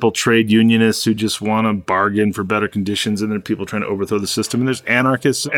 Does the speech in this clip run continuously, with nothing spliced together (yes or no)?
yes